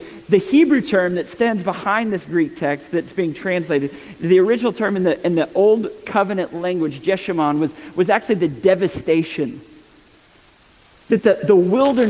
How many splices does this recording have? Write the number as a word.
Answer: zero